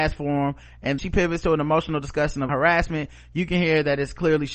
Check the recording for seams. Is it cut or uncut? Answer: cut